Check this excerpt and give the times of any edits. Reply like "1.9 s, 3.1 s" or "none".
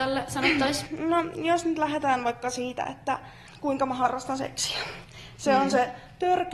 none